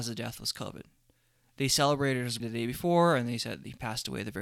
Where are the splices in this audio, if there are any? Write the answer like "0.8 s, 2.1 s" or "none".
2.4 s